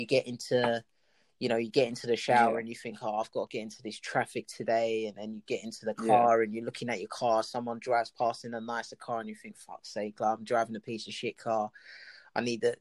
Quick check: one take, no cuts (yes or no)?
yes